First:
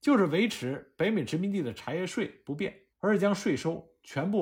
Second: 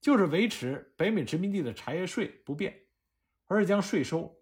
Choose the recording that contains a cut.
first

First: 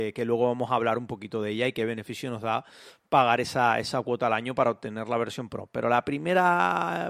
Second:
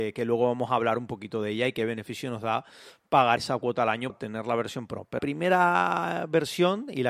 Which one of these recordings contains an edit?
second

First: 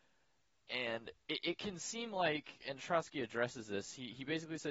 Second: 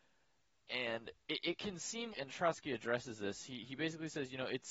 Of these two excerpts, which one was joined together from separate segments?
second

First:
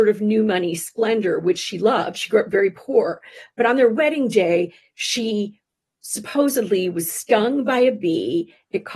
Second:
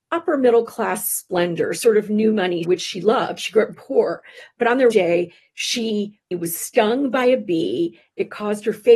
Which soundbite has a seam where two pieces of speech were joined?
second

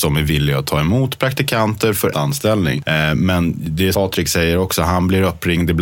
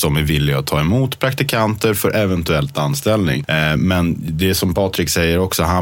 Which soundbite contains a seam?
first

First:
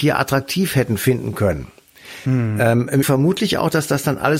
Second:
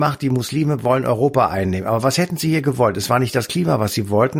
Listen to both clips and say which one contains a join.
first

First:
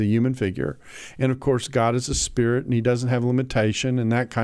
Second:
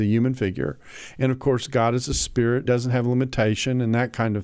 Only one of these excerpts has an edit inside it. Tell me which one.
second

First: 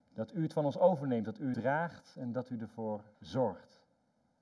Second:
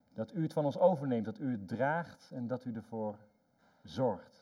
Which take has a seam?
first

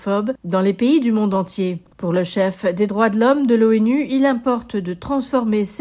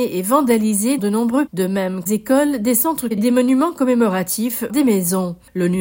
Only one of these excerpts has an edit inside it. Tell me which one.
second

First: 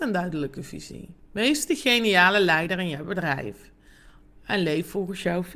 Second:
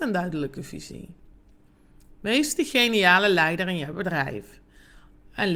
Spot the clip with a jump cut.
first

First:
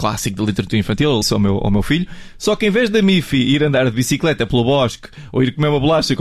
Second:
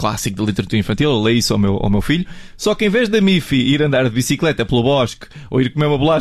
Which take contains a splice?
first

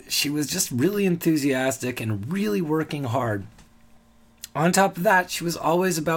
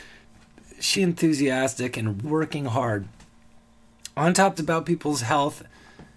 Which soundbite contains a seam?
second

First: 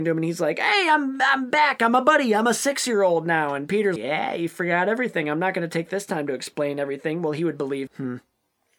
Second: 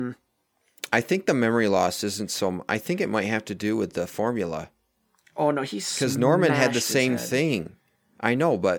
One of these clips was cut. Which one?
first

